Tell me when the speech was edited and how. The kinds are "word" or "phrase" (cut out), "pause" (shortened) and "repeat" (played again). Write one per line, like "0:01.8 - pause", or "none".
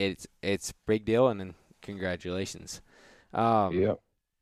none